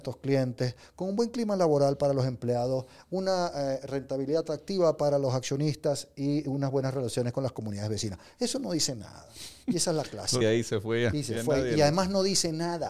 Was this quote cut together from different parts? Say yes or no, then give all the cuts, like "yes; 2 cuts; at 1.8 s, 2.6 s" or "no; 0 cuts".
yes; 1 cut; at 10.4 s